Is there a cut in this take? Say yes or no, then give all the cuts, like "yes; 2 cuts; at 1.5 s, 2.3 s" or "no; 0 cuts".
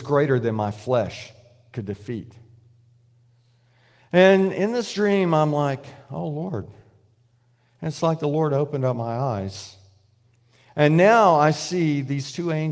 no; 0 cuts